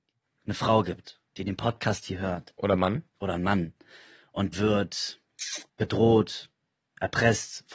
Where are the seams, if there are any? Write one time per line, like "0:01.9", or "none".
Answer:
0:01.3
0:03.1
0:04.5
0:05.7